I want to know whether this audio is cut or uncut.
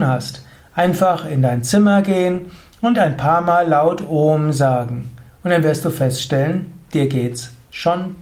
uncut